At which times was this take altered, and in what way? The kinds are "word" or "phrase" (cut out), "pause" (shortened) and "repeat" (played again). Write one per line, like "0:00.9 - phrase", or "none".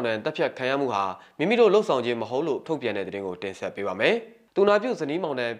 0:02.6 - word